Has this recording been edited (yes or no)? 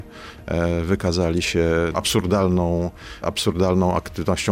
yes